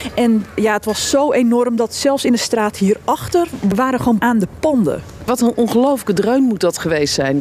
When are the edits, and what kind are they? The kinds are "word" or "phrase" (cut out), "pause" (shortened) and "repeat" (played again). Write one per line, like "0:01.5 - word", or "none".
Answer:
0:04.2 - word